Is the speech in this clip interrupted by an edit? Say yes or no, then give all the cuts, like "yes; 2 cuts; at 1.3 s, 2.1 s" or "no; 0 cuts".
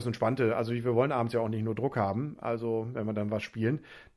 no; 0 cuts